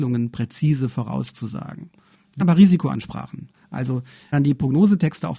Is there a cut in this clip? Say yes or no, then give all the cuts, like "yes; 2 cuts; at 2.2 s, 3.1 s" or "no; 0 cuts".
yes; 2 cuts; at 2.4 s, 4.3 s